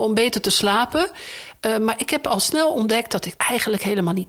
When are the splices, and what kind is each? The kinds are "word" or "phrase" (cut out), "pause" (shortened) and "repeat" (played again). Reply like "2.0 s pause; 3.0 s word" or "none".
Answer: 3.4 s word

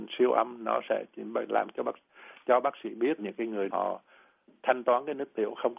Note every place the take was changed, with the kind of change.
3.2 s word; 3.7 s word

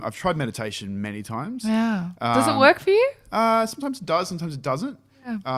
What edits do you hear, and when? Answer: none

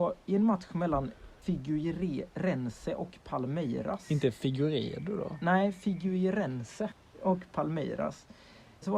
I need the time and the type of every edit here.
none

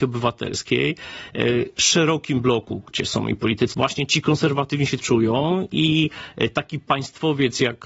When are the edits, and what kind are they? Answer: 3.7 s phrase; 5.0 s phrase

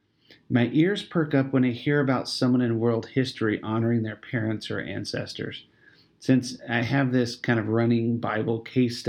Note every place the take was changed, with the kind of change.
none

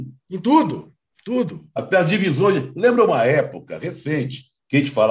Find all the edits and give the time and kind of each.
none

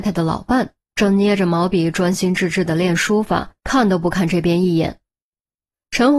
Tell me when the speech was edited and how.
3.6 s pause

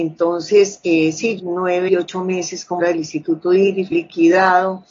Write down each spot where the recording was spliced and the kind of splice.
1.4 s word; 1.9 s word; 2.8 s word; 3.9 s word

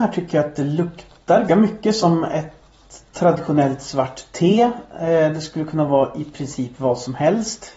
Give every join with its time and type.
1.5 s word

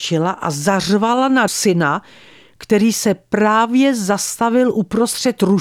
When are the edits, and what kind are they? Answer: 1.5 s word

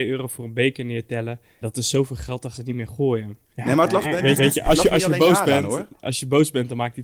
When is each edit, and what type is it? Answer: 1.6 s word; 2.5 s word; 3.4 s pause; 4.4 s repeat

